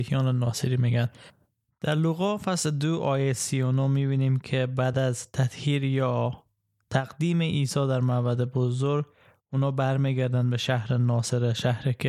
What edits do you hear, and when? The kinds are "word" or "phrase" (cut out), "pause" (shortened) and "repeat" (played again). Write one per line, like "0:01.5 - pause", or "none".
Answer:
none

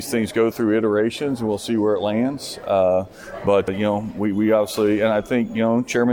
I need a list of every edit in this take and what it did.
0:03.7 - word

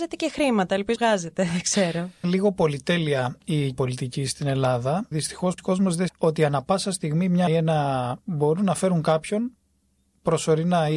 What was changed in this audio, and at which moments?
0:01.0 - word
0:02.2 - word
0:03.7 - word
0:05.1 - word
0:05.6 - word
0:06.1 - word
0:07.5 - word
0:08.2 - word

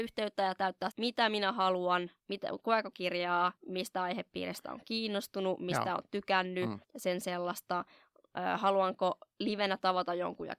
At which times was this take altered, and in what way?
0:00.9 - phrase
0:02.2 - pause
0:02.9 - phrase
0:03.6 - pause
0:06.8 - pause

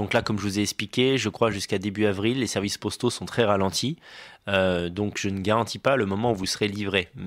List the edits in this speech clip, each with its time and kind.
none

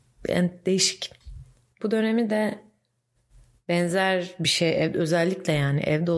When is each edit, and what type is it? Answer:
none

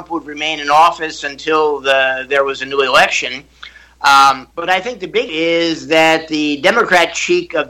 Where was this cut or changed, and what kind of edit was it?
0:04.5 - pause
0:05.3 - word

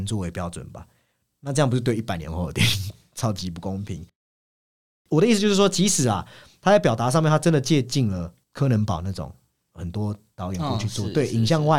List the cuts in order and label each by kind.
0:08.4 - pause

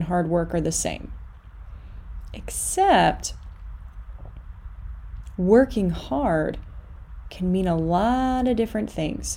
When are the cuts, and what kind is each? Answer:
none

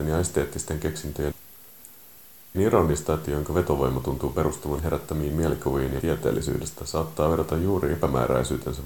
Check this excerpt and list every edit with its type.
0:01.3 - word
0:02.5 - word
0:03.2 - word
0:04.8 - word
0:06.0 - word

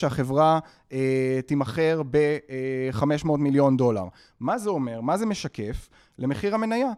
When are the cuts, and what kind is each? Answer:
none

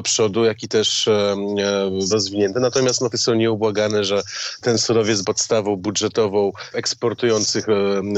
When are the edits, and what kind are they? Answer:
0:02.1 - word
0:03.1 - word
0:04.6 - word
0:05.2 - word
0:06.7 - word

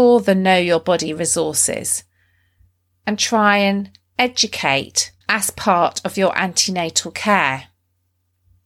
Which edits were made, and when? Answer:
0:05.2 - pause

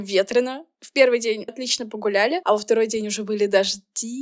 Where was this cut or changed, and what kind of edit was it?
0:01.5 - word

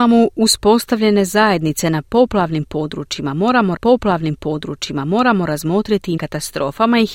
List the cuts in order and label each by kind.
0:03.8 - repeat
0:06.2 - phrase

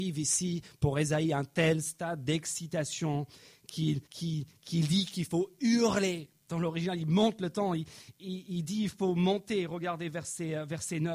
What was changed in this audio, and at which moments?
0:04.1 - pause
0:06.4 - pause

